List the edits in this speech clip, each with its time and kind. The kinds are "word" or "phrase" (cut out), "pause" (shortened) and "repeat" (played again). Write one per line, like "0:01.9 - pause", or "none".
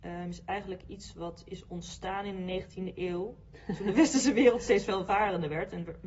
none